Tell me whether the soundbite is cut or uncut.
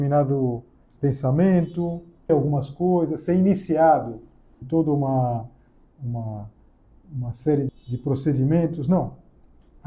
cut